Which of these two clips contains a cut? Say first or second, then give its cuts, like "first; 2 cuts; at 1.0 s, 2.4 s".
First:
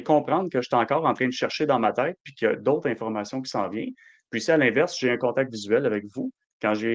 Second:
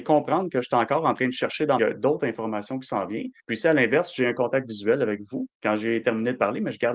second; 3 cuts; at 1.8 s, 3.4 s, 5.5 s